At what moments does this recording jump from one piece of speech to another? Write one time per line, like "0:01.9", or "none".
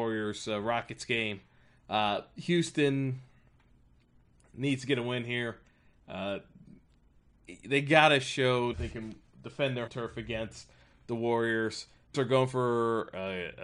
0:08.7
0:09.9
0:12.1

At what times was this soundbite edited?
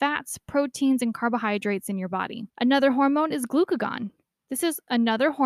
0:02.5

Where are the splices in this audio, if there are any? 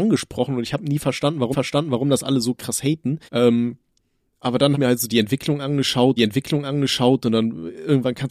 0:01.5
0:03.3
0:04.7
0:06.2

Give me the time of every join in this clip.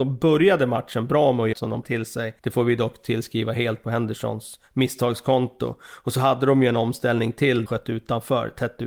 0:01.5
0:01.8
0:02.4
0:07.7

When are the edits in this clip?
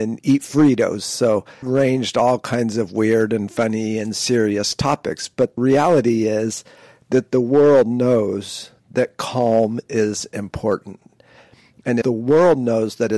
0:01.6
0:05.6
0:12.0

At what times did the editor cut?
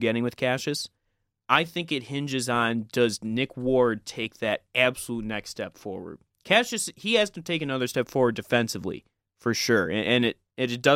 none

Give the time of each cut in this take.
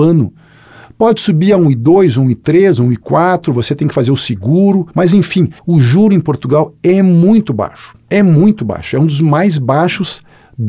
0:04.9
0:05.6
0:08.1

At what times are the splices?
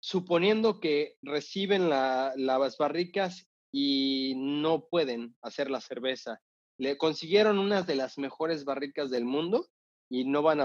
none

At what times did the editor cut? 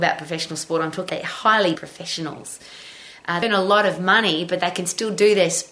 0:01.1
0:01.8
0:03.4

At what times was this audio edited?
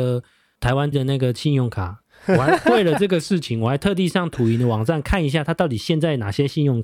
0:00.9

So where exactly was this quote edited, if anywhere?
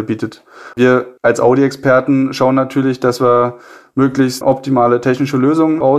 none

